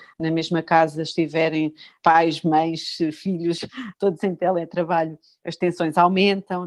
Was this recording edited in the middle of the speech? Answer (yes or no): no